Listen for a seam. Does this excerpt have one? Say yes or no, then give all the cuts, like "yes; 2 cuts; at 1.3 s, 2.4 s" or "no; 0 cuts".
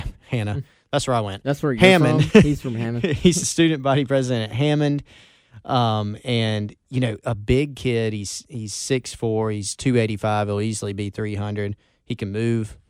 no; 0 cuts